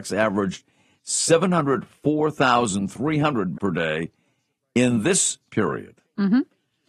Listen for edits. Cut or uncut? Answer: cut